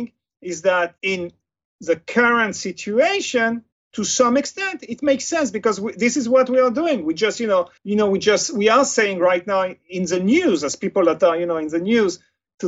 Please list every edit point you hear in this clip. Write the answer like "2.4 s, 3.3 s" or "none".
1.0 s, 3.7 s, 7.8 s